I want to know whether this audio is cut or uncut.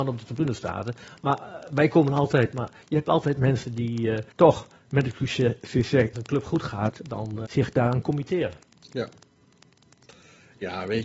cut